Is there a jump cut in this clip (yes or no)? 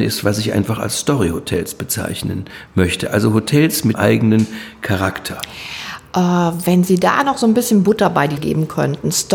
yes